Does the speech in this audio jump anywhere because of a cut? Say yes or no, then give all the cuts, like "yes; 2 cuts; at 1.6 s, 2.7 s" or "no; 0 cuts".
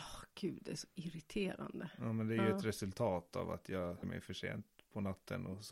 yes; 1 cut; at 4.0 s